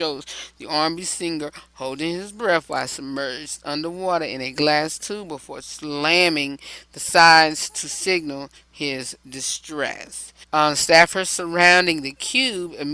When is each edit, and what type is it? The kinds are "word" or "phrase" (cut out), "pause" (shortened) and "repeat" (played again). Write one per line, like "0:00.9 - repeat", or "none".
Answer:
0:10.4 - pause